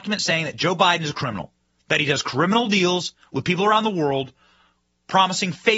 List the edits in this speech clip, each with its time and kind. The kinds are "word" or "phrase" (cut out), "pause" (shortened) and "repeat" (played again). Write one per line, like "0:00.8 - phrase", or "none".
0:01.6 - pause